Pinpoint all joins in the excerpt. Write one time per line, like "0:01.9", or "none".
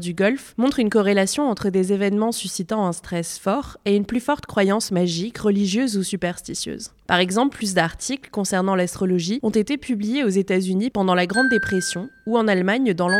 none